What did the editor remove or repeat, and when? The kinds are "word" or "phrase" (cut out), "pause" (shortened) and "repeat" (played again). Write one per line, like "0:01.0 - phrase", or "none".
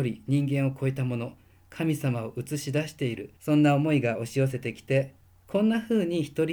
0:03.4 - pause
0:05.3 - pause